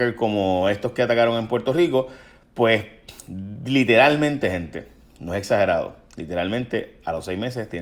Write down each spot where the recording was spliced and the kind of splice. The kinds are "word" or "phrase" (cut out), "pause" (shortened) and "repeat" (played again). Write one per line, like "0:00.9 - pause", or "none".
none